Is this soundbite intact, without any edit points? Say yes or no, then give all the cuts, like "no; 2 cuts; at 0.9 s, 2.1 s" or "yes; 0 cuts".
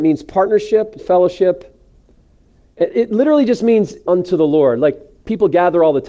no; 3 cuts; at 1.0 s, 2.9 s, 4.1 s